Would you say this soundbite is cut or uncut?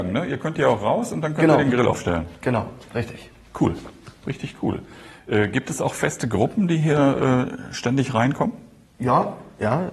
uncut